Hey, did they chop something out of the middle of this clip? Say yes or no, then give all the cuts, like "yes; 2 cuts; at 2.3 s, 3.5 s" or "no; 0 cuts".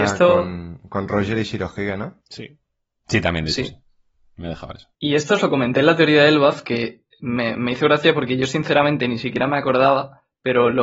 yes; 1 cut; at 2.2 s